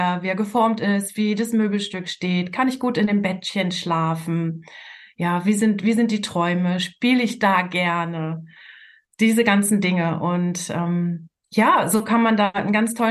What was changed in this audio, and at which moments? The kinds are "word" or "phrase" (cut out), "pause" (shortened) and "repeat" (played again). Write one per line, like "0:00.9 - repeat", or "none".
none